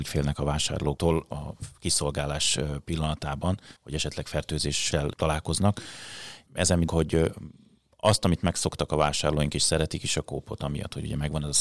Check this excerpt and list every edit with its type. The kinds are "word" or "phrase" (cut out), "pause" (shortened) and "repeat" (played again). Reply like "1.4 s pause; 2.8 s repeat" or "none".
3.8 s pause; 6.9 s word

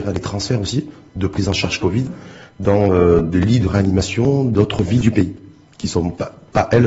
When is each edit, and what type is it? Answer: none

